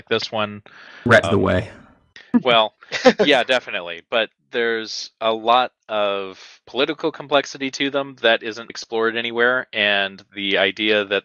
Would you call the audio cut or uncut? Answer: cut